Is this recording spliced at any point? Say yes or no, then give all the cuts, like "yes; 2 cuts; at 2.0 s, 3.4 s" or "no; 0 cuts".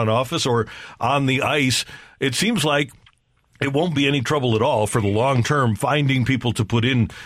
no; 0 cuts